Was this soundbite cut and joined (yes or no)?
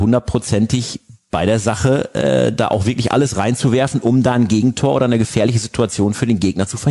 no